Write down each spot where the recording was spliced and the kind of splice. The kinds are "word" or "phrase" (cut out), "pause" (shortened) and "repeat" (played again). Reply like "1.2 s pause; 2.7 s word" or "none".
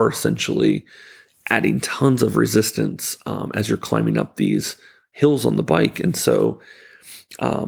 none